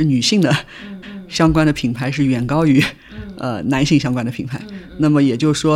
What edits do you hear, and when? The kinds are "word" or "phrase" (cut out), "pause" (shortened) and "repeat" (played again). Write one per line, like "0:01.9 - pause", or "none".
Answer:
0:01.0 - repeat